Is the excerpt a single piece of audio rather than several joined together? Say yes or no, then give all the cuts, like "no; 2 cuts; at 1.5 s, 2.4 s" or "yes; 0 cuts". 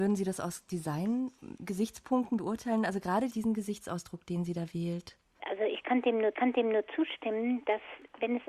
no; 2 cuts; at 3.3 s, 6.3 s